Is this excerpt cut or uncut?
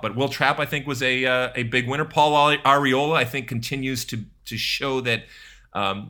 uncut